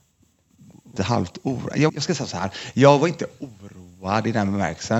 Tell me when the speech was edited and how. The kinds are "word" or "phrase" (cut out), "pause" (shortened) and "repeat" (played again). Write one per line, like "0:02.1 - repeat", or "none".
0:01.0 - word
0:01.9 - word